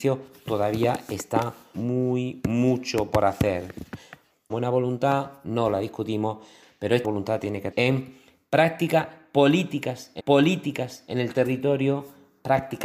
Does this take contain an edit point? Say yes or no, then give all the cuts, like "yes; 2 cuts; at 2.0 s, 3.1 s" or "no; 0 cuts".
yes; 5 cuts; at 1.7 s, 4.5 s, 7.0 s, 7.7 s, 10.2 s